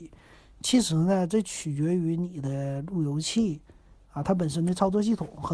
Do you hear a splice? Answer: no; 0 cuts

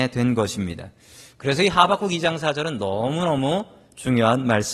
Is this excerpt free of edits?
yes; 0 cuts

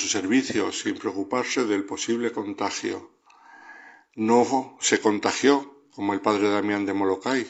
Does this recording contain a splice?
no; 0 cuts

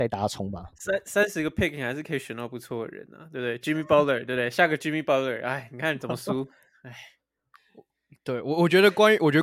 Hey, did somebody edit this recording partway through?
no; 0 cuts

